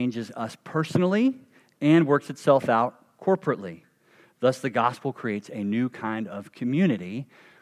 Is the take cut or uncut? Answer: uncut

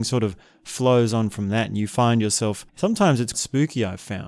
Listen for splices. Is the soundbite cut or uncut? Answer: cut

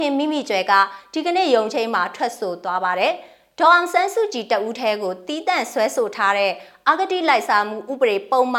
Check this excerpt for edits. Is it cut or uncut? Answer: uncut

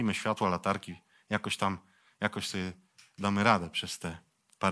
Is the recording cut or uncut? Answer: uncut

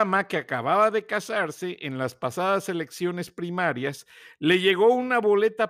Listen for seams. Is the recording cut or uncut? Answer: uncut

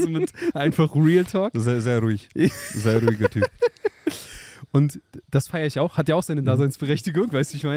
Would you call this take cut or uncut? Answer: uncut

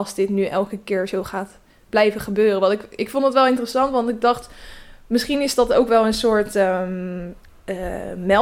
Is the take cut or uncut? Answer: uncut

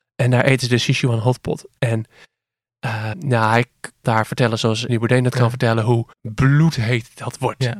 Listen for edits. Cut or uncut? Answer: cut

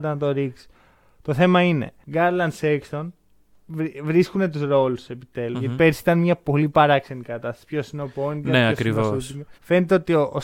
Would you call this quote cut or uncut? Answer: cut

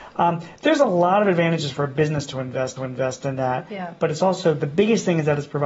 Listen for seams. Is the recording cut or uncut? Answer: cut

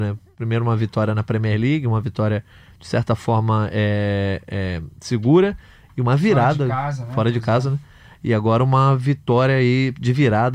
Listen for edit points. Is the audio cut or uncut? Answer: uncut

